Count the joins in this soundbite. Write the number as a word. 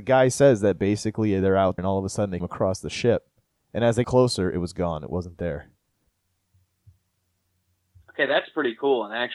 three